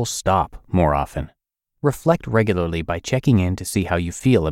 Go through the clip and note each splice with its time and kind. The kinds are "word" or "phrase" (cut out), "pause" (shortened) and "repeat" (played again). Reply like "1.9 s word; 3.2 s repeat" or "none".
none